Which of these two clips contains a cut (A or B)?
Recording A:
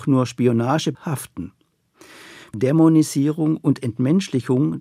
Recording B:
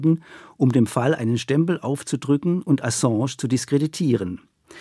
A